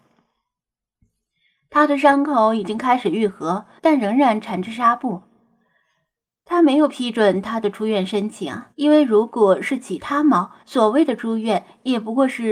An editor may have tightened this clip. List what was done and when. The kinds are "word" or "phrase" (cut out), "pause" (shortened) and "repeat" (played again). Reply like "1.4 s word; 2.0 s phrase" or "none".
3.8 s pause; 8.7 s pause; 10.6 s pause